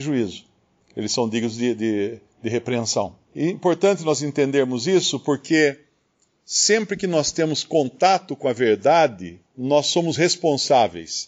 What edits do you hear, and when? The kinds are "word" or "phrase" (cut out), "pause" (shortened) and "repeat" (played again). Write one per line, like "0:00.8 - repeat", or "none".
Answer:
0:03.2 - pause
0:09.5 - pause